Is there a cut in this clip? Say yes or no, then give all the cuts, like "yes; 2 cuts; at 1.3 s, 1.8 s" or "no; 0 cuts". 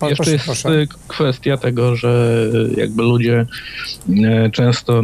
yes; 1 cut; at 1.0 s